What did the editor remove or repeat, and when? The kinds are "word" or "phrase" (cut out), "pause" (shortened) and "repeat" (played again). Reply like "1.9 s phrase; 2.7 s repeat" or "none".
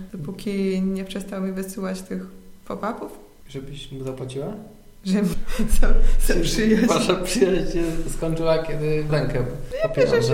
5.3 s phrase; 9.1 s word